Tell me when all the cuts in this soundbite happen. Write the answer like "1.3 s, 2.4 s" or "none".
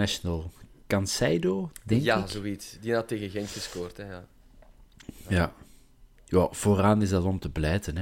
none